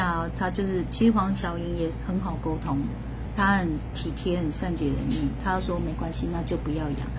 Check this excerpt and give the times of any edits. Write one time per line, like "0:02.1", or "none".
0:03.4